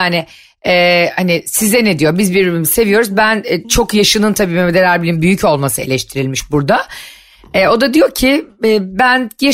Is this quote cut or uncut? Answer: uncut